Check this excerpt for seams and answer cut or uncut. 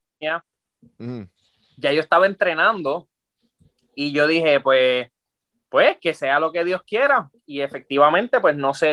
uncut